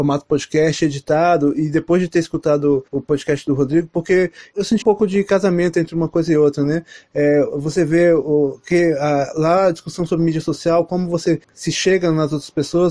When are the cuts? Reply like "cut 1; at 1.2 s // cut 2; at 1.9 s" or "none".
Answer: cut 1; at 2.9 s // cut 2; at 4.8 s // cut 3; at 11.4 s

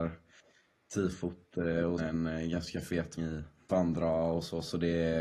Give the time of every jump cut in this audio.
cut 1; at 2.0 s // cut 2; at 3.2 s // cut 3; at 3.7 s

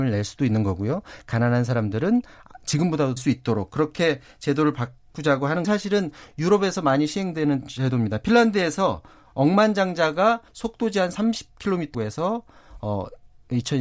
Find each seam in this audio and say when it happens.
cut 1; at 3.2 s // cut 2; at 5.6 s // cut 3; at 10.5 s // cut 4; at 11.9 s

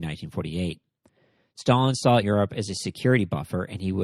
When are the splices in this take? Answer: cut 1; at 2.2 s

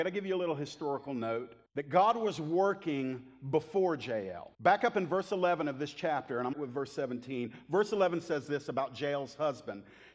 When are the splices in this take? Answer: cut 1; at 1.7 s // cut 2; at 4.5 s // cut 3; at 6.5 s

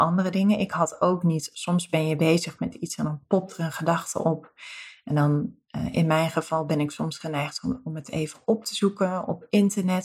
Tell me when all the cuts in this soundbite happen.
none

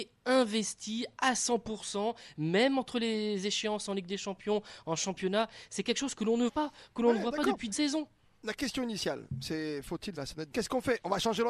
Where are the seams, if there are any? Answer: cut 1; at 6.5 s // cut 2; at 7.7 s // cut 3; at 10.2 s // cut 4; at 10.5 s

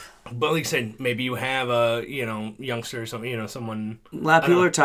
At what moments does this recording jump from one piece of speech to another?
none

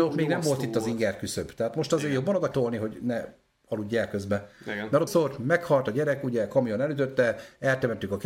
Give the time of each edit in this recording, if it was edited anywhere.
cut 1; at 2.5 s // cut 2; at 5.1 s

